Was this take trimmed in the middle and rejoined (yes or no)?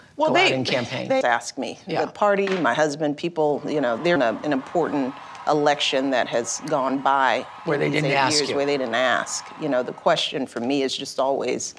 yes